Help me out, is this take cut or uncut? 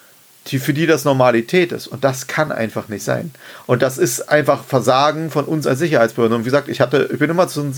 uncut